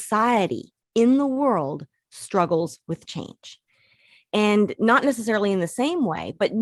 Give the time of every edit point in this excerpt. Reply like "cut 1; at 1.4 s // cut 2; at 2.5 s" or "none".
none